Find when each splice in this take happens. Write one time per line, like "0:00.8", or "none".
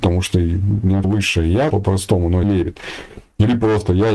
0:01.0
0:01.7
0:02.4